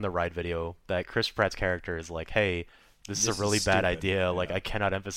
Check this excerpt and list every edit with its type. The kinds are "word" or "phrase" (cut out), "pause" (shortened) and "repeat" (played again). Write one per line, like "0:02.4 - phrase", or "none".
none